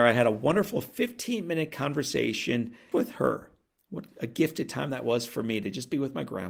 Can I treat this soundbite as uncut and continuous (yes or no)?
no